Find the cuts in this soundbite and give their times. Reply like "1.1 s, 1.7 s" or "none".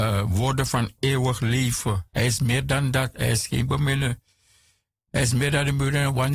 none